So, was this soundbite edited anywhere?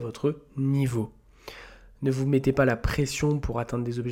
no; 0 cuts

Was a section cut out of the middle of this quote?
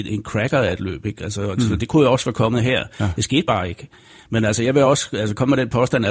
no; 0 cuts

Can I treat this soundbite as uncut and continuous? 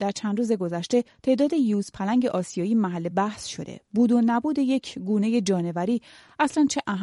yes; 0 cuts

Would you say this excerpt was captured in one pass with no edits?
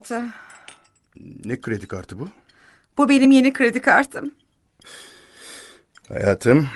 yes; 0 cuts

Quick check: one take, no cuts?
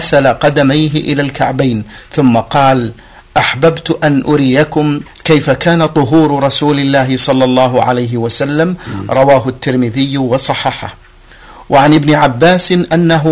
yes; 0 cuts

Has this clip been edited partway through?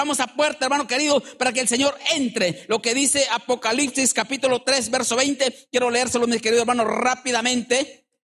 no; 0 cuts

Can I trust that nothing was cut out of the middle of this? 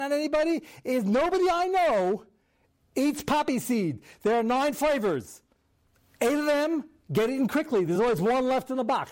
yes; 0 cuts

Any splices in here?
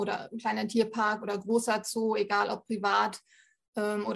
no; 0 cuts

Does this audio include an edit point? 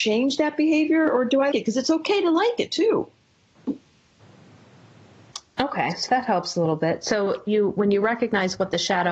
yes; 3 cuts; at 1.5 s, 6.1 s, 7.5 s

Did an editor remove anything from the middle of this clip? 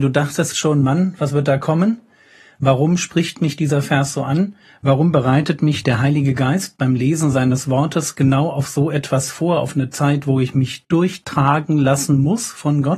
no; 0 cuts

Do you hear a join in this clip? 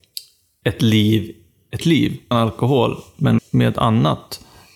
yes; 3 cuts; at 1.8 s, 2.3 s, 3.4 s

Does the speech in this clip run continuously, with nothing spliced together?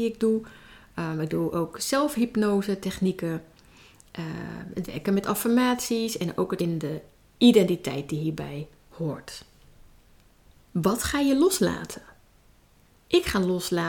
no; 1 cut; at 6.6 s

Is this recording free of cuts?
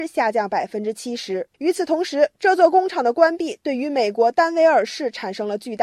no; 1 cut; at 1.5 s

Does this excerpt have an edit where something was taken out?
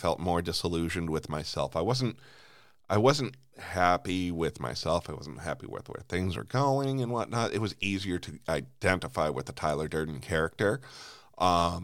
no; 0 cuts

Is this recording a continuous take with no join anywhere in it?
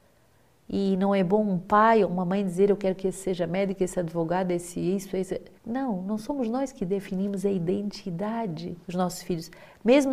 no; 2 cuts; at 5.6 s, 8.8 s

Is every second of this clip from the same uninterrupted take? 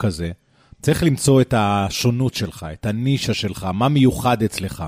yes; 0 cuts

